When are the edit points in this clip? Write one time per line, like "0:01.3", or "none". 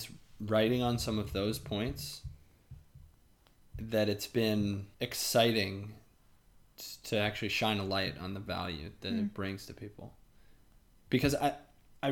0:04.9